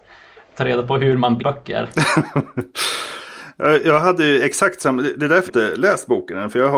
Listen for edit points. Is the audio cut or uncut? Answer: cut